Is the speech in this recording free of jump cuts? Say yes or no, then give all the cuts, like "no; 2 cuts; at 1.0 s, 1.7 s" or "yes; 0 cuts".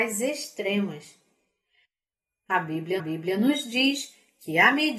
no; 1 cut; at 3.0 s